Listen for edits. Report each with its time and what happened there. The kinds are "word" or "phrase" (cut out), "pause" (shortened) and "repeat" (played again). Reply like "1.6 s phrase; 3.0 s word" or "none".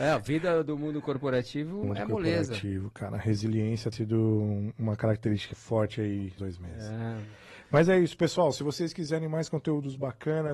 1.8 s word; 3.9 s word; 5.5 s word; 6.4 s phrase